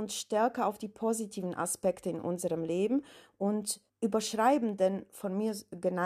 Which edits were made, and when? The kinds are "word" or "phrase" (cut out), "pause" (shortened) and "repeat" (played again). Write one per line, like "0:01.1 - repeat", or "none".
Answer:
0:03.9 - pause